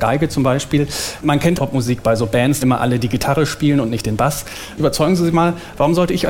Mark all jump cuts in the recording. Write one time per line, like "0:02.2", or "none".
0:01.6
0:02.6
0:05.3